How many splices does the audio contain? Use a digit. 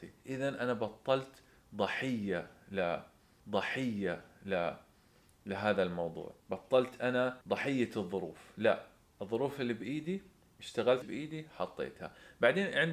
4